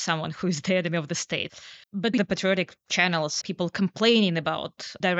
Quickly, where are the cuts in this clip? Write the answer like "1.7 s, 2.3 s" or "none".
1.8 s, 2.2 s, 3.4 s